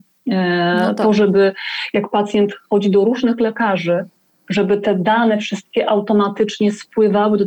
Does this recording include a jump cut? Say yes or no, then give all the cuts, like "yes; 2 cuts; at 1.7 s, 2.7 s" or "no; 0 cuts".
no; 0 cuts